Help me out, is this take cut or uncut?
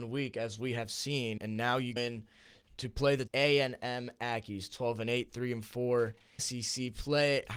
cut